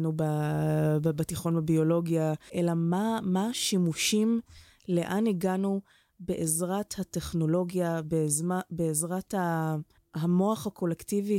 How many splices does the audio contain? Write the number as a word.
zero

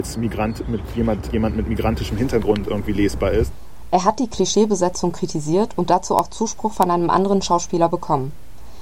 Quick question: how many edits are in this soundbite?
one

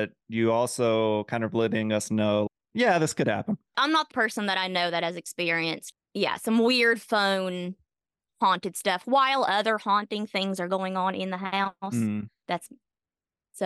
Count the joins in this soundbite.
one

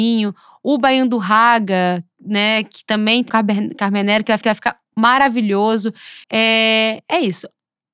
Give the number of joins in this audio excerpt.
three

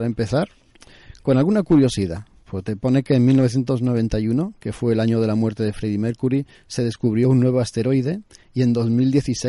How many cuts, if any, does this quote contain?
zero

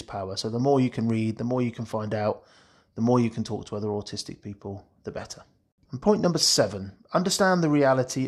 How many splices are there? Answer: zero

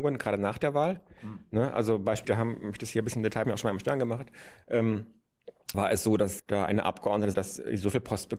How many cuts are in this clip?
five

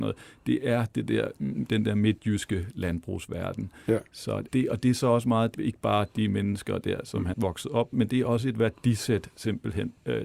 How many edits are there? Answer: four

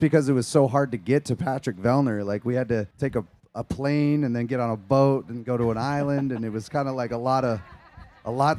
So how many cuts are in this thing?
two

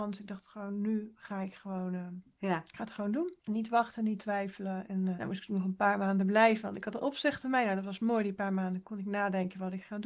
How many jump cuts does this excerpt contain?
two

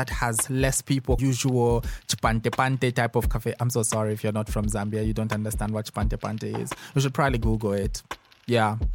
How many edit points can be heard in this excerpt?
one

